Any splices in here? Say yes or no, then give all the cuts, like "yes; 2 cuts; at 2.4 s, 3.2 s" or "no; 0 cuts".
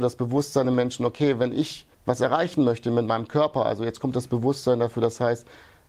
yes; 1 cut; at 1.9 s